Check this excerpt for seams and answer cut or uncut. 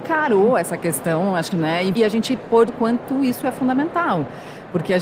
cut